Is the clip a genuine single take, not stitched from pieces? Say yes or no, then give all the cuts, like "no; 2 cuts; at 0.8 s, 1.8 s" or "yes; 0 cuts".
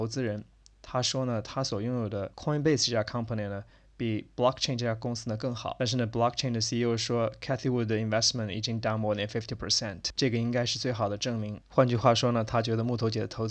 yes; 0 cuts